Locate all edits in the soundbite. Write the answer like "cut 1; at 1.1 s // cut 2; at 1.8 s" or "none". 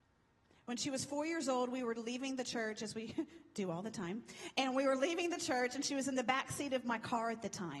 none